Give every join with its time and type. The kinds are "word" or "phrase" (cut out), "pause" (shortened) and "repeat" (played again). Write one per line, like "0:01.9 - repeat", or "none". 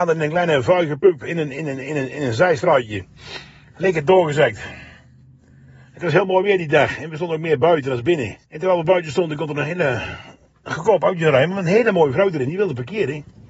0:08.4 - pause